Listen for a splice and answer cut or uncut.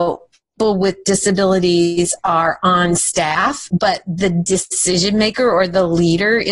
uncut